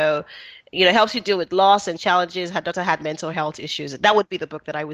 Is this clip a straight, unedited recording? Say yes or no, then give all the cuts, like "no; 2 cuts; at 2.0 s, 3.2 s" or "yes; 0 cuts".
yes; 0 cuts